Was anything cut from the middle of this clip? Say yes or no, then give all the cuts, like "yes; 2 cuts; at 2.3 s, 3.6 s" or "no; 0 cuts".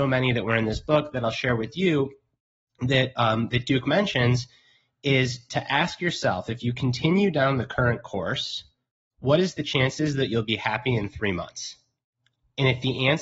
no; 0 cuts